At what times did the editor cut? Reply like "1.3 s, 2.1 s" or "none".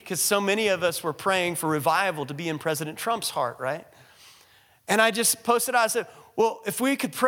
none